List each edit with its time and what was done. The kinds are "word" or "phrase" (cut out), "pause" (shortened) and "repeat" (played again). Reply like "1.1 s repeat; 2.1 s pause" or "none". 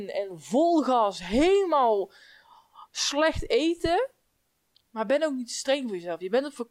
none